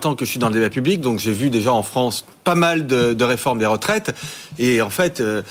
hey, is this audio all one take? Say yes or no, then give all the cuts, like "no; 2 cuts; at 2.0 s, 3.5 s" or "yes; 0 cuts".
yes; 0 cuts